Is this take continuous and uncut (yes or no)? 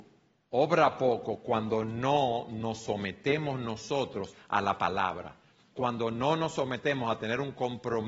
yes